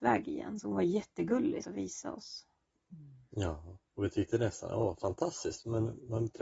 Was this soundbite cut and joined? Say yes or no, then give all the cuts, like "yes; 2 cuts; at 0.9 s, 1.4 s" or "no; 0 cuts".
yes; 2 cuts; at 1.6 s, 3.9 s